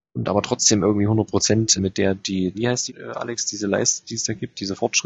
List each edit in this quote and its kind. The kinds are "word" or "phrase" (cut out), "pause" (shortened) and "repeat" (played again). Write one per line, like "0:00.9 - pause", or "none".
0:01.8 - word
0:02.5 - word
0:02.9 - word